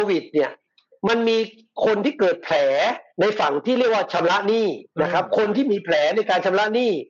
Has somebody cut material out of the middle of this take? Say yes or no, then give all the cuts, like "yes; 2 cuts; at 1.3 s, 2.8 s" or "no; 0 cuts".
yes; 2 cuts; at 3.1 s, 4.9 s